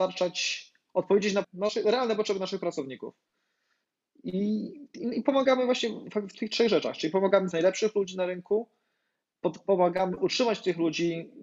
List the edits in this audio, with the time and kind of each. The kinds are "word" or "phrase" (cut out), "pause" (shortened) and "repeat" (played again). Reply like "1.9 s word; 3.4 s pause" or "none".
1.4 s word; 7.5 s word